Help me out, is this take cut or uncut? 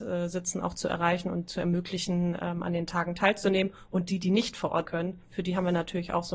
cut